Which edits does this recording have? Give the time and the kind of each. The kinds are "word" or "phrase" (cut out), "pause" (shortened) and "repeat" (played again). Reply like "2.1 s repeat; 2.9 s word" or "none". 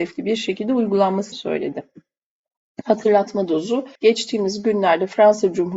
1.3 s word; 4.0 s pause

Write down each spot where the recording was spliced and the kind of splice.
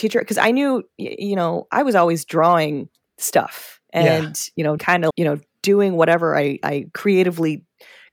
3.8 s pause; 4.8 s phrase; 5.1 s word

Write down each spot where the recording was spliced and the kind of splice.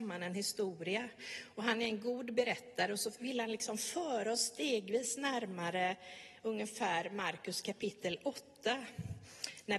none

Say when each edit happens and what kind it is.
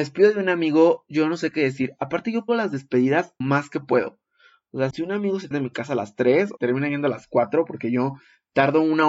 2.5 s word; 3.4 s word; 4.9 s word; 5.5 s phrase; 6.6 s phrase

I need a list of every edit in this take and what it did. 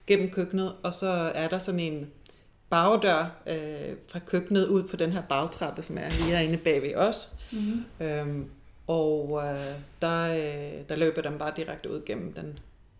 none

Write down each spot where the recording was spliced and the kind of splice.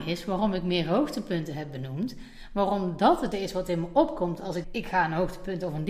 3.3 s word; 4.6 s word

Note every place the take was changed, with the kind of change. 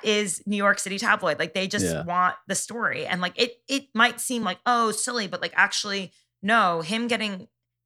none

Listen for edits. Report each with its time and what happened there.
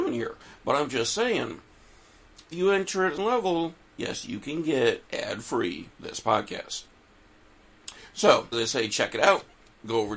2.5 s word; 3.2 s word; 3.8 s pause; 5.1 s pause; 5.9 s pause; 8.5 s word

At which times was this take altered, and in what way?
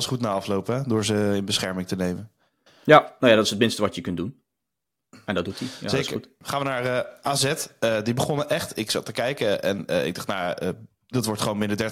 none

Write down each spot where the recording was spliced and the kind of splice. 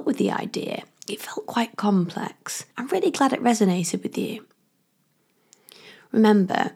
2.7 s pause

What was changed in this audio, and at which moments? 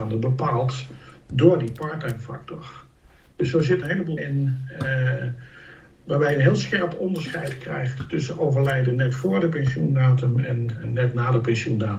3.8 s word; 4.2 s word; 10.8 s word

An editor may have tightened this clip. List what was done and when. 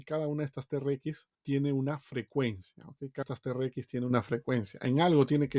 1.3 s pause; 3.2 s word

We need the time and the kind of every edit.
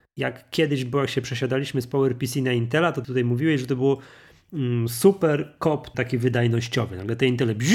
3.0 s word; 5.9 s word

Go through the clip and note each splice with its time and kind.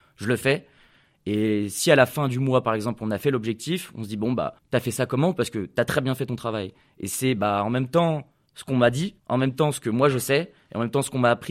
4.6 s pause; 9.2 s pause

